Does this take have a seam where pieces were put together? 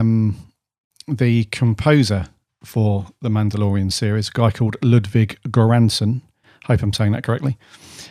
no; 0 cuts

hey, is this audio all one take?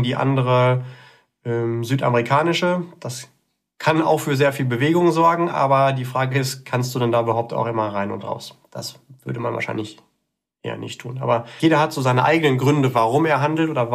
yes; 0 cuts

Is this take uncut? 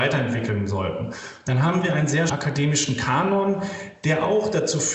no; 1 cut; at 2.3 s

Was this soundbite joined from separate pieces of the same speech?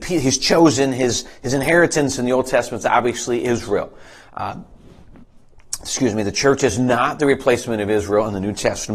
no; 0 cuts

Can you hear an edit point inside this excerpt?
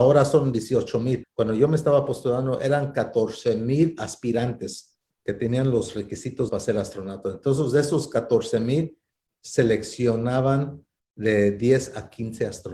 yes; 2 cuts; at 1.2 s, 6.5 s

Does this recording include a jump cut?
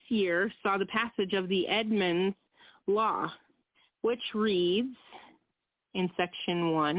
no; 0 cuts

